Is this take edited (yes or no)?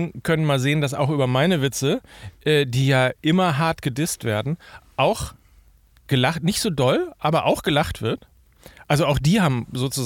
no